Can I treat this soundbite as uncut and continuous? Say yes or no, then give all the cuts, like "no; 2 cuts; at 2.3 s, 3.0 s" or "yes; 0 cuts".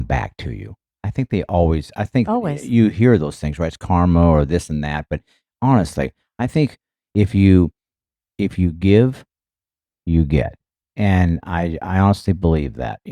yes; 0 cuts